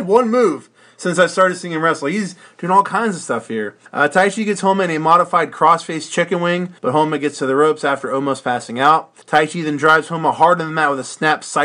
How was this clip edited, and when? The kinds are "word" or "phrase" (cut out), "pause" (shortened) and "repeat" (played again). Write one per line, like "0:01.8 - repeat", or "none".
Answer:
0:03.9 - pause
0:06.8 - pause
0:09.2 - pause